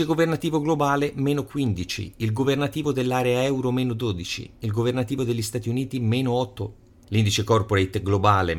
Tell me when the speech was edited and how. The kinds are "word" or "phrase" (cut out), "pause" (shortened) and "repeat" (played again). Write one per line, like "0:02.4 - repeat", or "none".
none